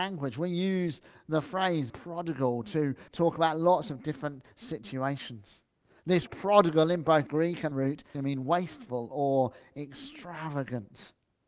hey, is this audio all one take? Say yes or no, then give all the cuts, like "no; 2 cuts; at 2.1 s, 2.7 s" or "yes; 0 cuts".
no; 6 cuts; at 1.9 s, 3.1 s, 6.3 s, 7.3 s, 7.7 s, 8.1 s